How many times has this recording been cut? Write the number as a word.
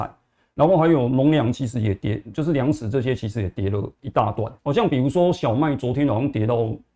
one